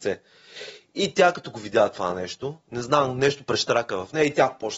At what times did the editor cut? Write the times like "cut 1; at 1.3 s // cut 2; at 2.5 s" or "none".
none